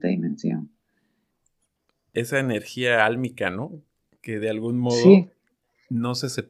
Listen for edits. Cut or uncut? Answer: uncut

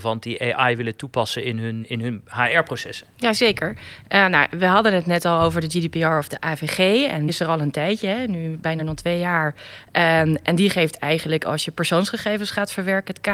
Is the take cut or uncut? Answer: cut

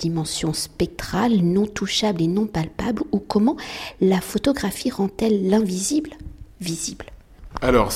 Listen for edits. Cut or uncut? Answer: uncut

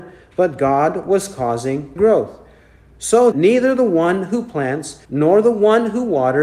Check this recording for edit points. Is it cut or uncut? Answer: cut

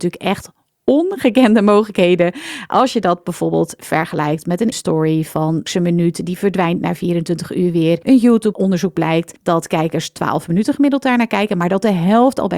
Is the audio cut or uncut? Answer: cut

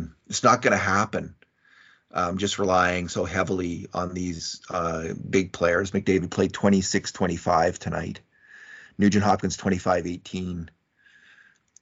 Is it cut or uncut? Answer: uncut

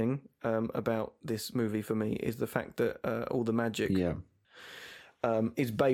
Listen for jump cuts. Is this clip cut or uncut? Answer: uncut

